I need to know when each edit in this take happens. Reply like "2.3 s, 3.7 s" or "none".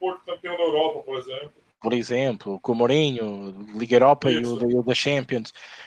none